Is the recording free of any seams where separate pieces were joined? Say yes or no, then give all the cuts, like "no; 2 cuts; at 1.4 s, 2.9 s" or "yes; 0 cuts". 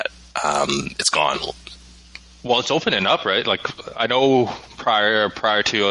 yes; 0 cuts